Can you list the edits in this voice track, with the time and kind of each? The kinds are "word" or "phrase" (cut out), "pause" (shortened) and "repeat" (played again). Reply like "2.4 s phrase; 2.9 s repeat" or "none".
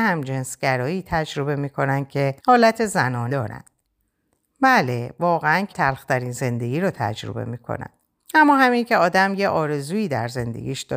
2.4 s pause; 3.3 s word; 3.8 s pause; 5.7 s word; 8.2 s pause